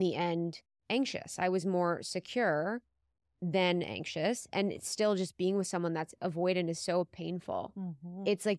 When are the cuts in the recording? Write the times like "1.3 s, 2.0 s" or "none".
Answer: none